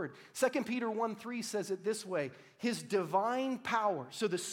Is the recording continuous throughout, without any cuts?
yes; 0 cuts

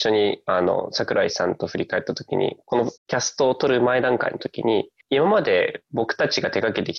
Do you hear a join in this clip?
yes; 2 cuts; at 3.0 s, 5.0 s

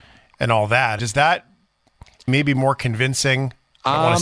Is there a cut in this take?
yes; 2 cuts; at 1.0 s, 2.3 s

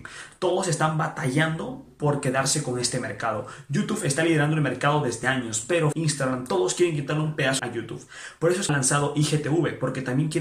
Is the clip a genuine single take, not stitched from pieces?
no; 4 cuts; at 5.2 s, 5.9 s, 7.6 s, 8.7 s

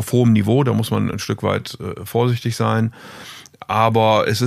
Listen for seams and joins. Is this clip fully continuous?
yes; 0 cuts

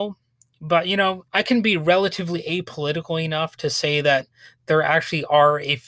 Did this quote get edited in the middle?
yes; 1 cut; at 1.3 s

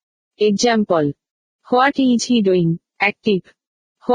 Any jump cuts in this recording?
no; 0 cuts

